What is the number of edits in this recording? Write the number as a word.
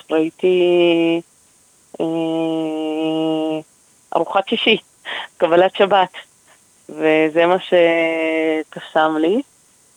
zero